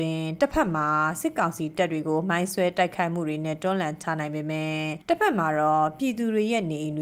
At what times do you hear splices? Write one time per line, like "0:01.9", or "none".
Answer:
0:05.0

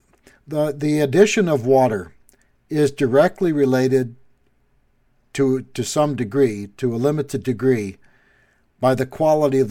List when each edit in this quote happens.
none

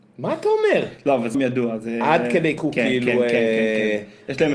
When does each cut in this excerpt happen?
0:01.3
0:02.6

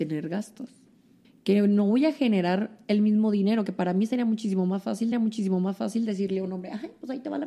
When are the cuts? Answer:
0:01.2
0:05.1

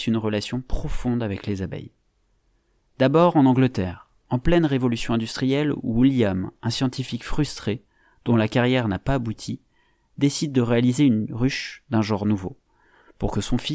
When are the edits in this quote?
none

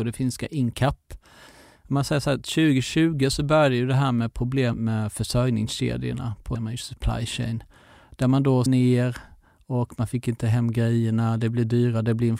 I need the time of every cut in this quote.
0:04.7
0:06.5
0:08.7

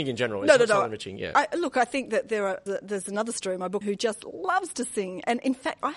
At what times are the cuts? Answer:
0:02.7
0:03.8

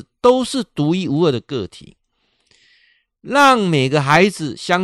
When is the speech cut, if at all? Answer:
none

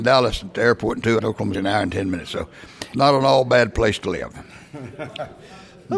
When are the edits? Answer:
0:01.2
0:01.5
0:02.9

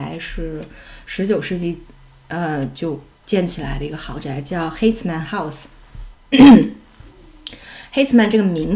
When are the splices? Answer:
none

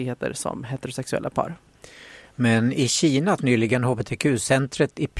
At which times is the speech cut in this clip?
0:03.4

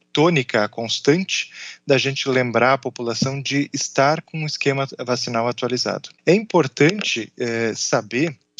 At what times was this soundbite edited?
0:06.2

